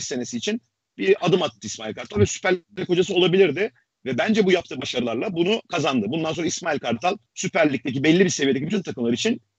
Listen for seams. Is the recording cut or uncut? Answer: cut